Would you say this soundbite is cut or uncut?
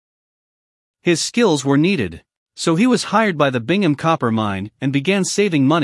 uncut